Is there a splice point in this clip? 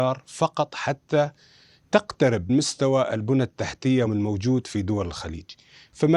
yes; 2 cuts; at 2.5 s, 4.1 s

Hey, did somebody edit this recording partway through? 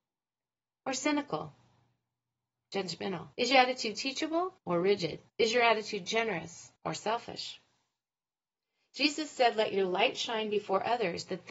yes; 4 cuts; at 3.3 s, 4.6 s, 5.3 s, 6.8 s

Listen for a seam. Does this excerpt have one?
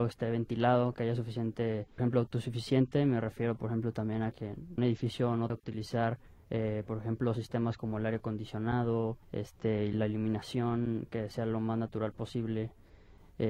yes; 5 cuts; at 2.0 s, 4.8 s, 5.5 s, 6.3 s, 9.2 s

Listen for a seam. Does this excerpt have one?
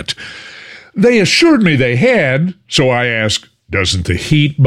no; 0 cuts

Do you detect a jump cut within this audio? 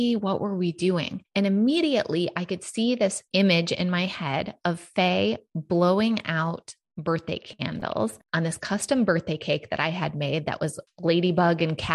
yes; 1 cut; at 8.3 s

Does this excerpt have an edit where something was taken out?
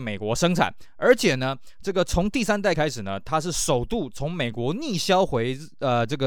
yes; 1 cut; at 2.7 s

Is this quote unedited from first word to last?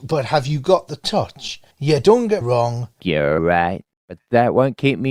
no; 4 cuts; at 1.7 s, 2.4 s, 3.0 s, 3.4 s

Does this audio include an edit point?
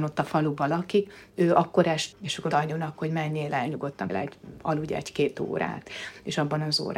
yes; 4 cuts; at 1.3 s, 2.1 s, 2.5 s, 4.1 s

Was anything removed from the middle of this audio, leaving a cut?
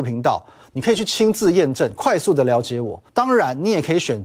yes; 1 cut; at 3.1 s

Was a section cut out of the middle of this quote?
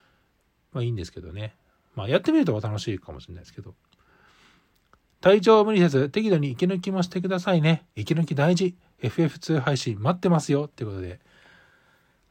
no; 0 cuts

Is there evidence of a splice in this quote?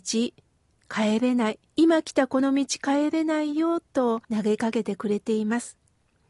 yes; 2 cuts; at 1.7 s, 4.2 s

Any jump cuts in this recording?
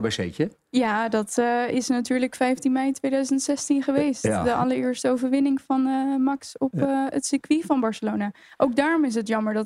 no; 0 cuts

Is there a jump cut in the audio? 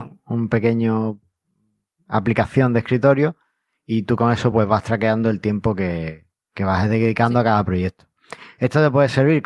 no; 0 cuts

